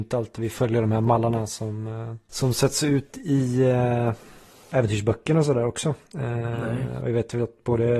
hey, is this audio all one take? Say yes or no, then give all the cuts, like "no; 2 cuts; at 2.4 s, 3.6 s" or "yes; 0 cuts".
yes; 0 cuts